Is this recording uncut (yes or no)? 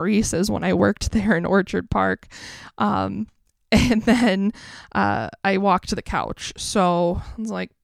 yes